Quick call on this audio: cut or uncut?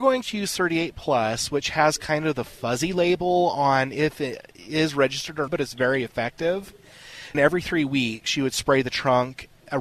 cut